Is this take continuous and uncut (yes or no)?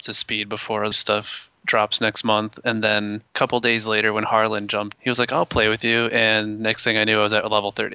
no